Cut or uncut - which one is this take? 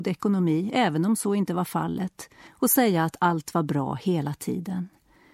cut